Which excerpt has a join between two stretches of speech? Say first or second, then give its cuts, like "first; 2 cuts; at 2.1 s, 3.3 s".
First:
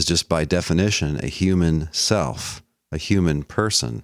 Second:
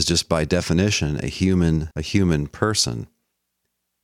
second; 1 cut; at 1.9 s